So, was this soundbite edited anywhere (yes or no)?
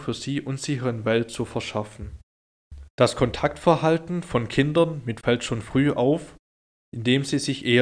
yes